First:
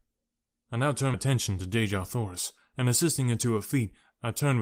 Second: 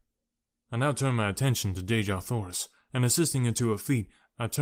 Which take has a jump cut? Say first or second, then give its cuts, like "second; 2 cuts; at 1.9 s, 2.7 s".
first; 1 cut; at 1.1 s